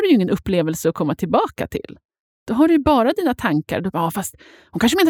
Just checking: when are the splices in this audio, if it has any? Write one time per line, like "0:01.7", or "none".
none